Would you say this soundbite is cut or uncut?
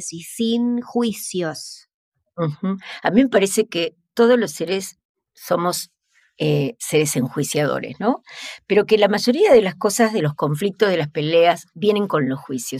uncut